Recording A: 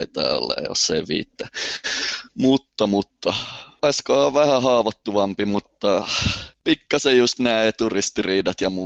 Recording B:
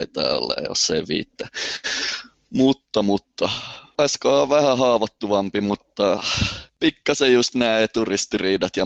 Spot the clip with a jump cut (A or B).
A